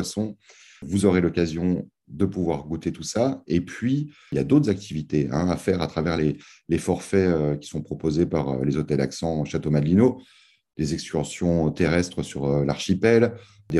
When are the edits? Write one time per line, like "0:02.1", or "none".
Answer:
none